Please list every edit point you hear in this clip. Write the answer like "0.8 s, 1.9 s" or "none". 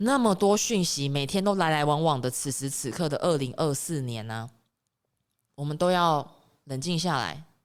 none